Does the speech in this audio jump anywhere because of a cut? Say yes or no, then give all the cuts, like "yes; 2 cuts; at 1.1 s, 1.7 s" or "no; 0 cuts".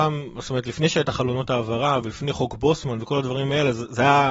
no; 0 cuts